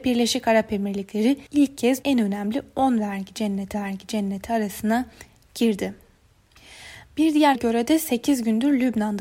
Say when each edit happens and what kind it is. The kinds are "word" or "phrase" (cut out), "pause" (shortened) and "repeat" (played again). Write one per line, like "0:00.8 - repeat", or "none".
0:01.5 - pause
0:02.0 - word
0:03.7 - repeat
0:07.5 - word